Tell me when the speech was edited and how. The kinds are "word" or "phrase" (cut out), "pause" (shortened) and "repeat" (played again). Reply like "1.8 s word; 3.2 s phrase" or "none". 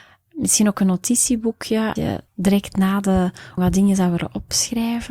2.0 s word; 2.3 s pause; 3.6 s word